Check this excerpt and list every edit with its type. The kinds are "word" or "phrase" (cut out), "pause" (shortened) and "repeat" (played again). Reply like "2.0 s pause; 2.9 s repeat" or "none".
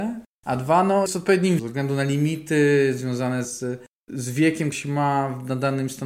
1.1 s word; 1.6 s word; 3.4 s word; 4.7 s word